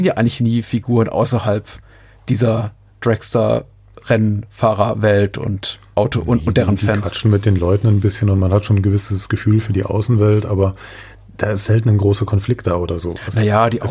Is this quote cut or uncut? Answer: uncut